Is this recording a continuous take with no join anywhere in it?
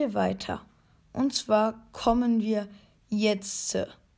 yes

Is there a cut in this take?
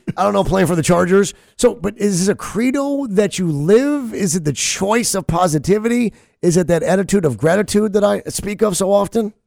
no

